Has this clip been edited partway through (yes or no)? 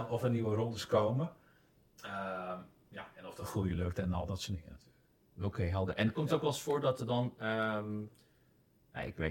no